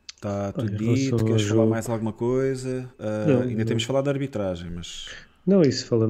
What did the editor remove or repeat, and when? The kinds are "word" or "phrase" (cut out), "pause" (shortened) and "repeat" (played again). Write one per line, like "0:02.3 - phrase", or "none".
0:02.9 - pause